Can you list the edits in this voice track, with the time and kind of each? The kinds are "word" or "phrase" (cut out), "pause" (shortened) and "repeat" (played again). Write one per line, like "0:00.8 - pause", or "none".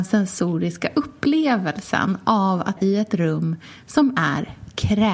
0:02.8 - word